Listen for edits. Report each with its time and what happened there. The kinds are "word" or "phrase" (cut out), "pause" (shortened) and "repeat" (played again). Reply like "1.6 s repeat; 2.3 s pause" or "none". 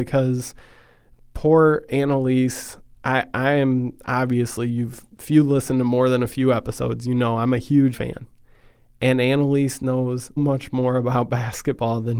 7.9 s word; 10.4 s word

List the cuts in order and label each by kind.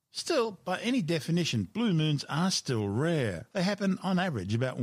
none

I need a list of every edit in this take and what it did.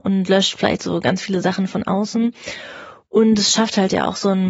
none

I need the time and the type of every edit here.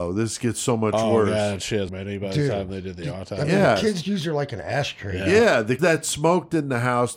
1.9 s word; 4.0 s word; 5.8 s word

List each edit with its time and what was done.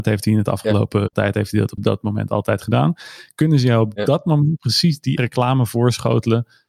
1.1 s word; 1.8 s word; 5.2 s word

